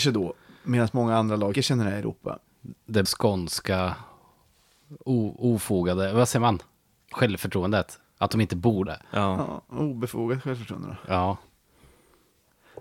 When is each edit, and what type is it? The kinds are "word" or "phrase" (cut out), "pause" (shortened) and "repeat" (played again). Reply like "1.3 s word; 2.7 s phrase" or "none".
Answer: 1.5 s word; 3.0 s word; 5.0 s word; 8.9 s word